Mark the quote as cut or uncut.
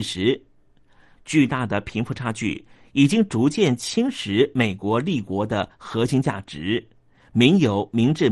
uncut